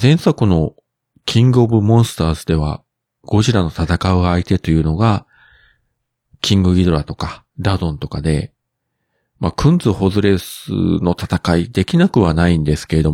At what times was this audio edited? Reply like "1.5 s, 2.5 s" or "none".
7.5 s